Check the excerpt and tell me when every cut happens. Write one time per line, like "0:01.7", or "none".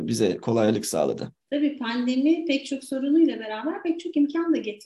0:01.4